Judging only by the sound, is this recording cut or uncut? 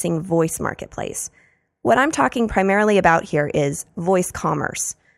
uncut